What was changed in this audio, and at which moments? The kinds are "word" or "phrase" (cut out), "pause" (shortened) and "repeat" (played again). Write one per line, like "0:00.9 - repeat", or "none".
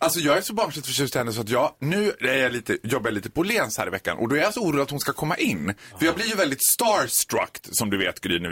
none